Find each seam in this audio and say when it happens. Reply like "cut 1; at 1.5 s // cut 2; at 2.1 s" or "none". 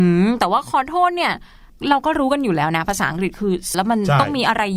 cut 1; at 3.7 s